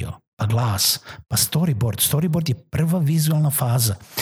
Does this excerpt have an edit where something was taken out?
no; 0 cuts

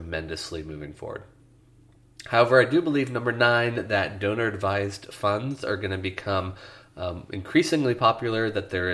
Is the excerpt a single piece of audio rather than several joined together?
yes; 0 cuts

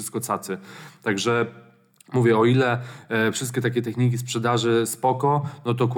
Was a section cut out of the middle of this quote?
no; 0 cuts

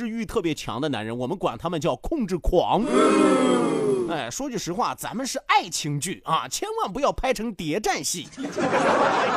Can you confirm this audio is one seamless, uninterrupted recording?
yes; 0 cuts

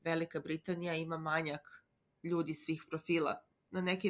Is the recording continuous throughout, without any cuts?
yes; 0 cuts

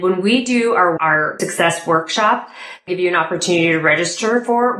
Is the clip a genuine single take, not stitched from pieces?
no; 3 cuts; at 1.0 s, 1.4 s, 2.9 s

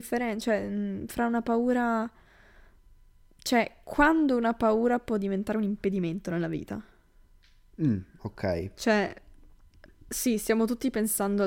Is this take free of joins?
yes; 0 cuts

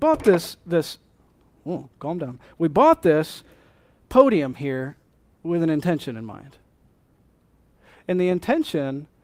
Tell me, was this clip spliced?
no; 0 cuts

